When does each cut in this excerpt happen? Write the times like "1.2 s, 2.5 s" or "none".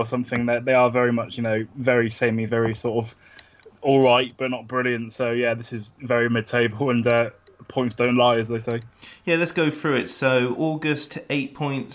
none